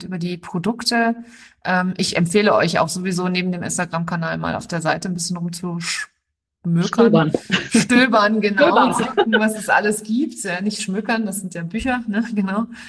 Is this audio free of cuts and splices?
yes; 0 cuts

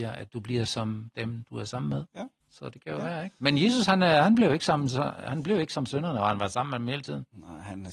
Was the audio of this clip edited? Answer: yes; 1 cut; at 2.4 s

